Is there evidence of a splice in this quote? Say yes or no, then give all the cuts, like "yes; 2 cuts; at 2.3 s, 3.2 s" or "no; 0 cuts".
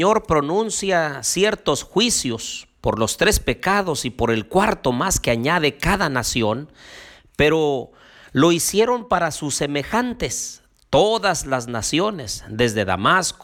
no; 0 cuts